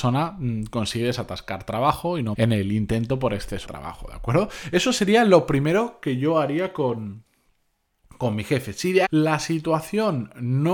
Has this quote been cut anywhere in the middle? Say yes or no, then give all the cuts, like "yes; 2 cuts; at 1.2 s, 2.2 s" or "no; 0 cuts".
yes; 3 cuts; at 2.3 s, 3.7 s, 9.1 s